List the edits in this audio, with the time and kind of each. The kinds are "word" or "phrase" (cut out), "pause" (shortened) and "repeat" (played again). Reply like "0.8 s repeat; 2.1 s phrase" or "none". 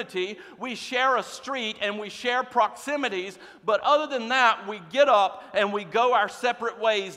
none